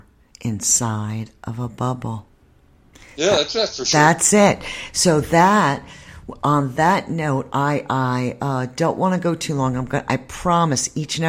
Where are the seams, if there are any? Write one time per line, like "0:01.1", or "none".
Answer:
0:02.9